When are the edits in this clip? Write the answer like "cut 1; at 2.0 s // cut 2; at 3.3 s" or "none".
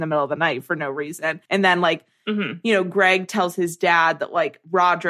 cut 1; at 1.5 s